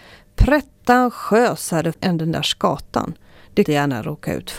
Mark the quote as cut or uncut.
cut